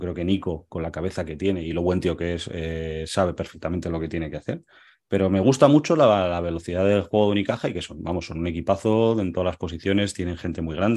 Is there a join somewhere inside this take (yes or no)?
no